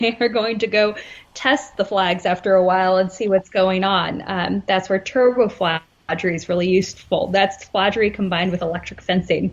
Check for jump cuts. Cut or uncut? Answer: uncut